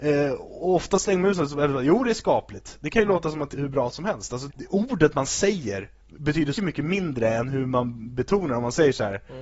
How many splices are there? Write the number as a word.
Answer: four